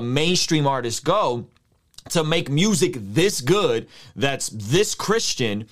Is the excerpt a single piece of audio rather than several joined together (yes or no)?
yes